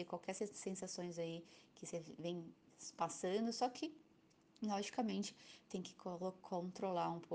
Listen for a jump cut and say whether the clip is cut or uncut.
uncut